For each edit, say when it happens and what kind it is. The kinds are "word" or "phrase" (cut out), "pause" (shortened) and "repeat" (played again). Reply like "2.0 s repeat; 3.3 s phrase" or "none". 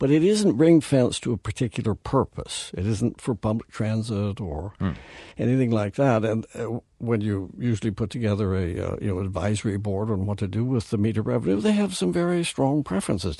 5.3 s pause